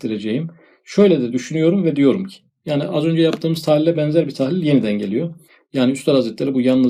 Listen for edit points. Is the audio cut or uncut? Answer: uncut